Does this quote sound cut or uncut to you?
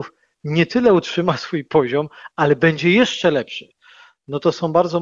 uncut